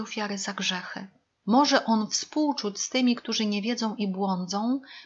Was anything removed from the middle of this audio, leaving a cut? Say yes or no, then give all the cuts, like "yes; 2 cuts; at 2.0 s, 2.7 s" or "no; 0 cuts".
no; 0 cuts